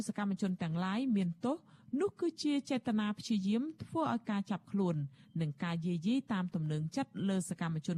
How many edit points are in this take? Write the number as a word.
zero